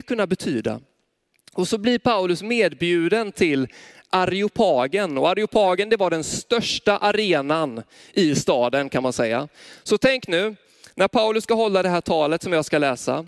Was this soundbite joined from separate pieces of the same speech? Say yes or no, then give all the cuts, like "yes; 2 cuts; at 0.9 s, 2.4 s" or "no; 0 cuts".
no; 0 cuts